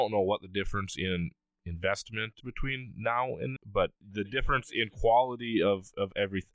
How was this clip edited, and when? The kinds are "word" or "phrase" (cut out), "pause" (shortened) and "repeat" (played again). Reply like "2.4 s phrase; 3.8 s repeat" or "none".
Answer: 2.4 s phrase; 3.6 s word; 4.0 s pause